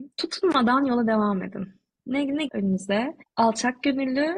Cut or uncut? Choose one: cut